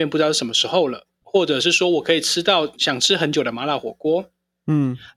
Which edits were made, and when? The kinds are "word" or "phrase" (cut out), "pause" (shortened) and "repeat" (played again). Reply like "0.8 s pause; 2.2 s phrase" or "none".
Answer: 1.2 s word